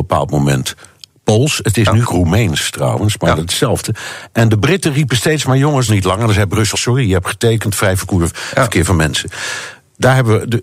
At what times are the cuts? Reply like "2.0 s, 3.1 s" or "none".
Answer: 2.0 s, 5.9 s, 6.7 s